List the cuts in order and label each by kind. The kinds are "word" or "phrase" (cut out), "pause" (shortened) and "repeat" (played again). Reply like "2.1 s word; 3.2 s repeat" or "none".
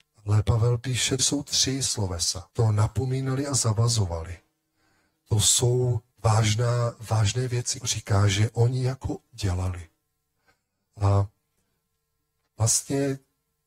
1.2 s word; 2.5 s pause; 6.1 s pause; 7.8 s word; 9.3 s word